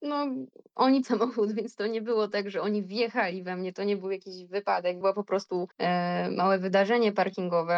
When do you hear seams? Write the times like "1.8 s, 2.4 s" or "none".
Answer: 1.0 s, 5.0 s, 5.7 s